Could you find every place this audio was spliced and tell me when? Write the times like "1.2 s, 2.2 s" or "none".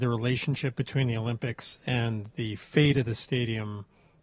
none